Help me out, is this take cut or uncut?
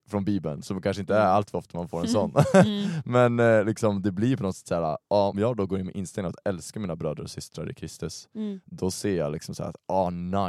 cut